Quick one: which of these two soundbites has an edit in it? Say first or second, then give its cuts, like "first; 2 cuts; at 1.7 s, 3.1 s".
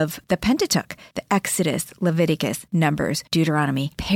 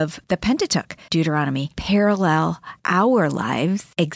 second; 1 cut; at 1.1 s